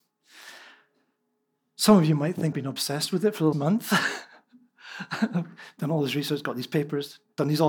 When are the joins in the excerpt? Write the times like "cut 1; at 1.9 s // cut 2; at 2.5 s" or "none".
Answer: cut 1; at 2.5 s // cut 2; at 3.5 s